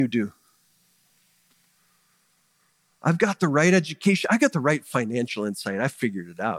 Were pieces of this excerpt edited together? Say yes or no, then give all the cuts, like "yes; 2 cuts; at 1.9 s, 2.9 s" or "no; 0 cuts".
no; 0 cuts